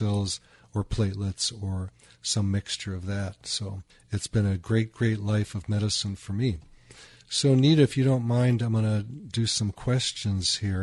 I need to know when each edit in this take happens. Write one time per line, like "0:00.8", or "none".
0:03.9